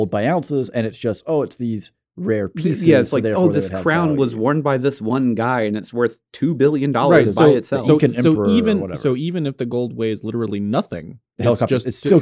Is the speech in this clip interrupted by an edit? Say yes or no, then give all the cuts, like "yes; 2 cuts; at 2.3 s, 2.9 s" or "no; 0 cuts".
no; 0 cuts